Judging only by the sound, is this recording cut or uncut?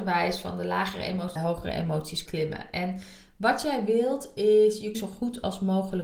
cut